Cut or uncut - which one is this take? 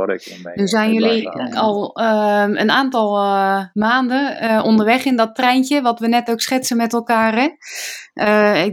cut